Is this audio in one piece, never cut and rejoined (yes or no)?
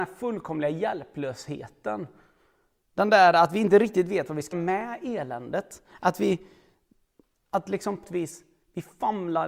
no